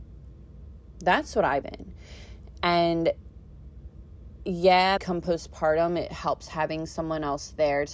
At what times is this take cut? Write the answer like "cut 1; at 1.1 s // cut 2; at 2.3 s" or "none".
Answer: cut 1; at 1.6 s // cut 2; at 5.0 s